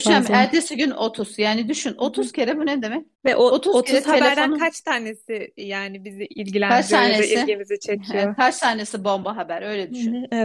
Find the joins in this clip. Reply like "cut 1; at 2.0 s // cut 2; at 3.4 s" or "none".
cut 1; at 3.1 s